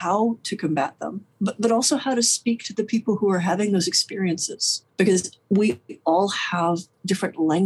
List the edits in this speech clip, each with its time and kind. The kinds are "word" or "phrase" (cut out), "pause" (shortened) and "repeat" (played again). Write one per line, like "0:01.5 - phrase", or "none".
0:01.3 - pause
0:04.9 - pause